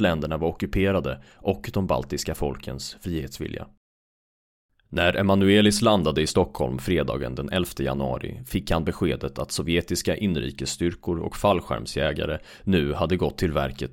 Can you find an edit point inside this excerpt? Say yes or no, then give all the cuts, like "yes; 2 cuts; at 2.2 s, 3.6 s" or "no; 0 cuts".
no; 0 cuts